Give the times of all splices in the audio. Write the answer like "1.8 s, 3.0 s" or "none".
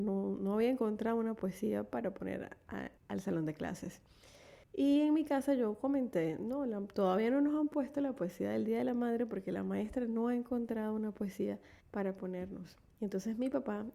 3.0 s, 4.6 s, 11.8 s, 12.9 s